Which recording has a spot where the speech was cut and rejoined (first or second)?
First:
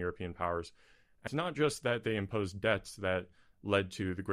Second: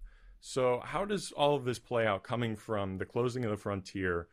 first